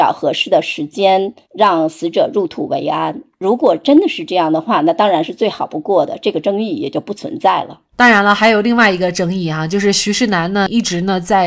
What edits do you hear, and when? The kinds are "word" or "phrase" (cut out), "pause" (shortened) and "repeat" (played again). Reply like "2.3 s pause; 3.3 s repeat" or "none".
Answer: 1.4 s pause; 7.9 s pause